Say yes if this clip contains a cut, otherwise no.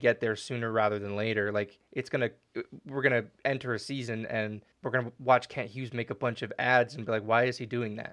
yes